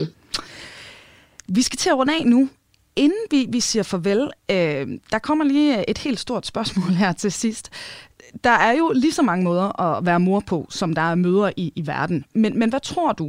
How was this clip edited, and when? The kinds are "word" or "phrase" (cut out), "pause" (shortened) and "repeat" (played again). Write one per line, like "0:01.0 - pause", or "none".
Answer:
none

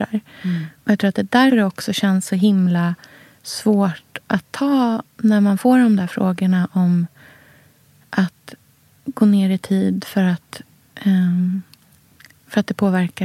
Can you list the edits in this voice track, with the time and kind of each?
0:01.5 - word

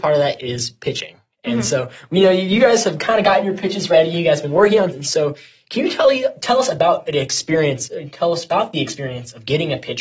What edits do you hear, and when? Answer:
0:04.9 - word

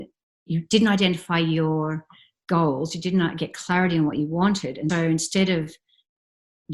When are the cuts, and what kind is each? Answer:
0:04.9 - word

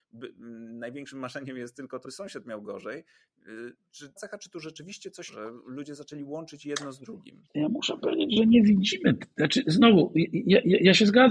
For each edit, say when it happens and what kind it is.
0:02.0 - word
0:04.2 - phrase
0:05.3 - phrase
0:07.5 - pause

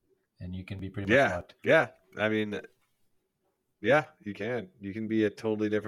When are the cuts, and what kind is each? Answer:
0:01.6 - pause

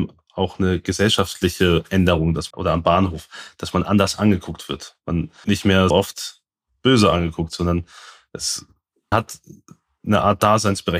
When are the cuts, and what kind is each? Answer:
0:02.5 - word
0:05.4 - word
0:05.9 - word
0:09.1 - word

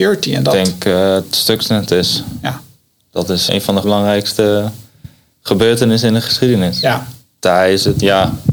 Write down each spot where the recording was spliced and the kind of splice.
0:01.2 - word
0:03.5 - word
0:03.8 - word

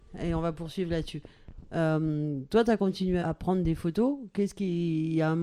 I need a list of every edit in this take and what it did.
0:03.2 - word

